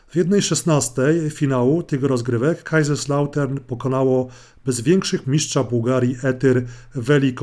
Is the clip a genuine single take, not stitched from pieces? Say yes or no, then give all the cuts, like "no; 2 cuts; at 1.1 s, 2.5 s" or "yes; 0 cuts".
no; 1 cut; at 5.2 s